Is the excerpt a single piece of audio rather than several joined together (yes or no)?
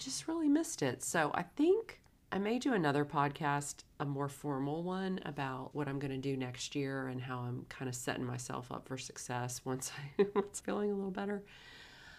no